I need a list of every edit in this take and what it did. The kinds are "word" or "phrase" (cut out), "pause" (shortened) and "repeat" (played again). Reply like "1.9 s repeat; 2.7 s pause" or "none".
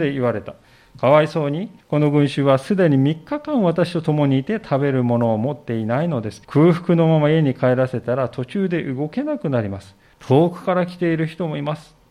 1.8 s pause; 6.4 s pause; 10.1 s pause